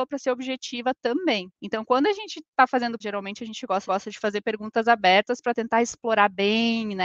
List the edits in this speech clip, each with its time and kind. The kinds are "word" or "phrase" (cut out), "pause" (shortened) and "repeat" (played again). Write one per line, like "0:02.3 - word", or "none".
0:01.5 - pause
0:03.0 - word
0:03.9 - repeat